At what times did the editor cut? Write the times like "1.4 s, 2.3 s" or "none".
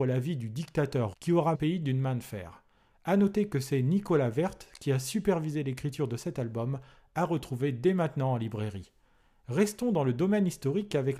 1.1 s, 1.5 s